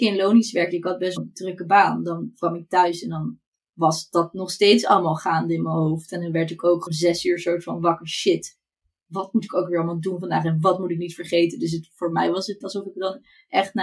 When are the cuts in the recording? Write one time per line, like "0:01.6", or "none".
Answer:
0:01.2
0:06.9
0:12.6